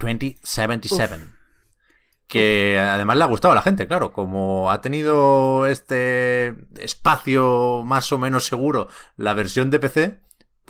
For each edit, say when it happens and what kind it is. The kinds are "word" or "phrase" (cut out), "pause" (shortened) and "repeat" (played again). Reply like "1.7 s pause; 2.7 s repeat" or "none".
none

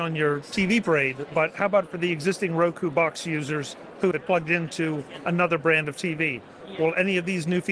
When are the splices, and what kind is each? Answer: 4.1 s word

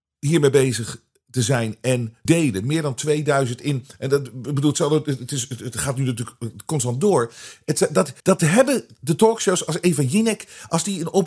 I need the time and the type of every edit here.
2.3 s word; 8.2 s pause

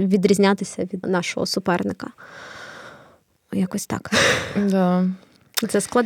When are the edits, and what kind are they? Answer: 1.0 s word

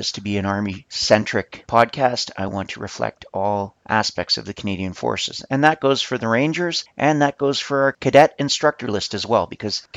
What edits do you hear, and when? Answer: none

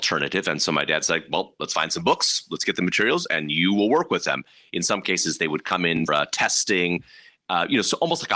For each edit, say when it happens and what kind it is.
6.1 s word

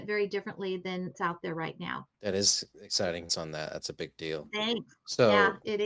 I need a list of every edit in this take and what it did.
1.1 s word; 2.1 s pause; 3.3 s word

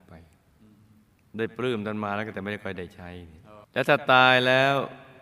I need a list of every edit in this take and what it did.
3.6 s pause

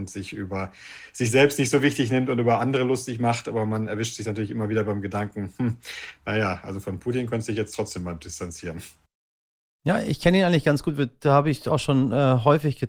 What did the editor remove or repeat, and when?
none

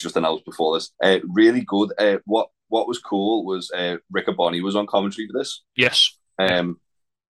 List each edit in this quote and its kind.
0.9 s pause

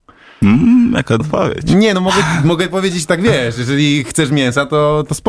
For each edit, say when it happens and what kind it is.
1.2 s word

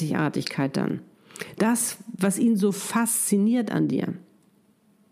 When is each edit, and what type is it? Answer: none

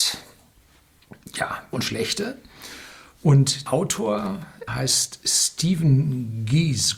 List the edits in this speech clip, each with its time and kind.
1.7 s word; 3.7 s word; 4.7 s word

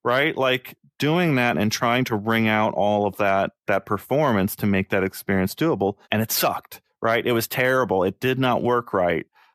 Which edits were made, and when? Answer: 3.6 s pause; 6.0 s pause

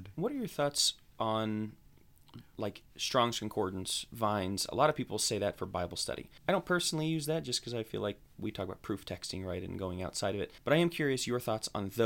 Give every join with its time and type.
2.5 s pause; 6.4 s pause; 10.6 s pause

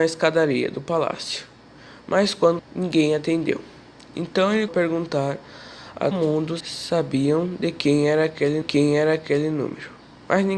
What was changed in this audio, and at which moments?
2.6 s word; 4.7 s phrase; 6.1 s word; 6.6 s word; 8.6 s repeat

